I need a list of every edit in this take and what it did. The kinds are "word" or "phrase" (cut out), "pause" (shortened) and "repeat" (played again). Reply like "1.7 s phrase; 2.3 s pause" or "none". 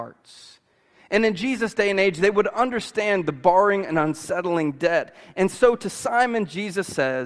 none